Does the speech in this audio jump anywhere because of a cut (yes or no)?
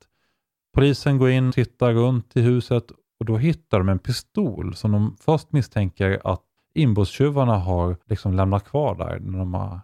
yes